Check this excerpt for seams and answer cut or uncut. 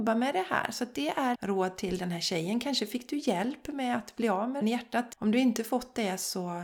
cut